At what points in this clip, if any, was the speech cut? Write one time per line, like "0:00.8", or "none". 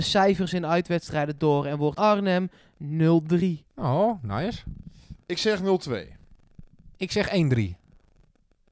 0:02.0
0:03.7
0:06.9